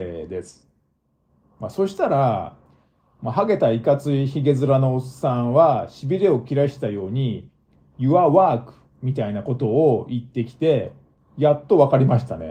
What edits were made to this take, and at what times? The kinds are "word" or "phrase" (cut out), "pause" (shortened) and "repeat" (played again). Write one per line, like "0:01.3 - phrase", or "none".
none